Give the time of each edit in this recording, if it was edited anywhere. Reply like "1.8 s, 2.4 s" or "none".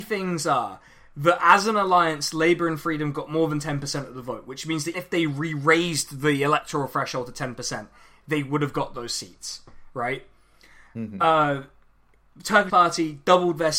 4.9 s, 12.7 s

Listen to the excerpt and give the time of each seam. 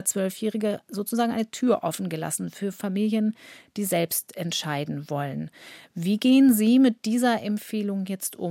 none

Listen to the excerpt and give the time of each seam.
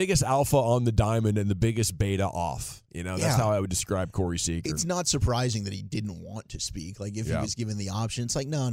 none

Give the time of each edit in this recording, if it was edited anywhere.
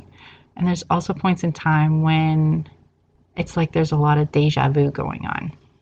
none

